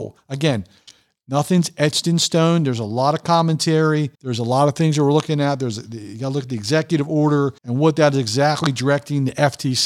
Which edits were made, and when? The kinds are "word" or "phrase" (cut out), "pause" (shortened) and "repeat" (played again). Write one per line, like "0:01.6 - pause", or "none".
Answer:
0:04.1 - pause
0:07.6 - pause